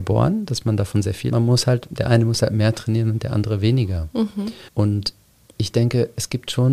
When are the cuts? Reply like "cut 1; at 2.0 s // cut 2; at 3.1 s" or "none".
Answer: cut 1; at 1.3 s // cut 2; at 4.7 s

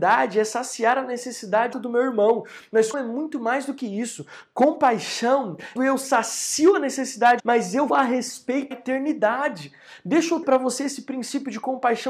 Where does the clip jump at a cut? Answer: cut 1; at 1.7 s // cut 2; at 2.9 s // cut 3; at 5.8 s // cut 4; at 7.4 s // cut 5; at 7.9 s // cut 6; at 8.7 s // cut 7; at 10.4 s

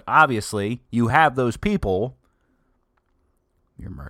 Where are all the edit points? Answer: none

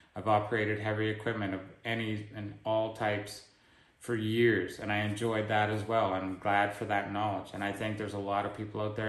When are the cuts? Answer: none

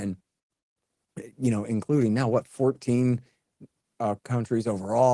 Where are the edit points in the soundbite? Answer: none

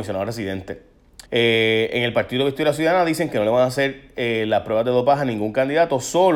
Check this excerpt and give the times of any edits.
cut 1; at 1.3 s

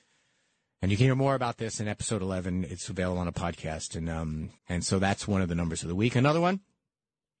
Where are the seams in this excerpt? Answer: cut 1; at 4.6 s

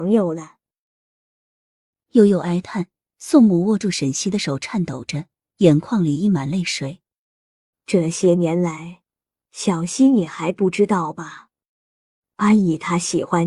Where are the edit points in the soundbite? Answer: none

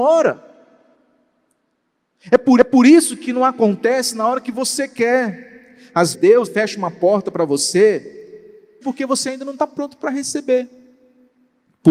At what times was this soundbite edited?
cut 1; at 2.6 s // cut 2; at 6.1 s // cut 3; at 6.5 s // cut 4; at 8.8 s

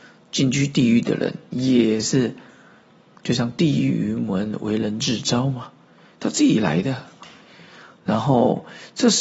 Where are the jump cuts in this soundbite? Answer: none

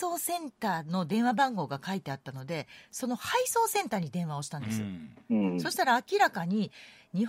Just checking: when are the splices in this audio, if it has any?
none

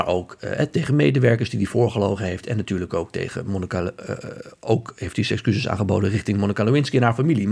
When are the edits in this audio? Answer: none

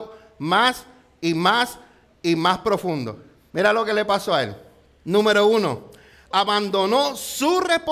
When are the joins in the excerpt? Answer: cut 1; at 6.3 s

